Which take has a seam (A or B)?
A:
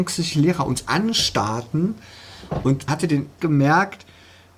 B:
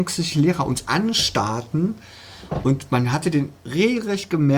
A